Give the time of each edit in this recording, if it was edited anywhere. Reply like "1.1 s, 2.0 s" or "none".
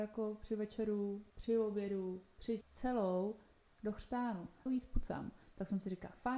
1.3 s, 2.6 s, 4.7 s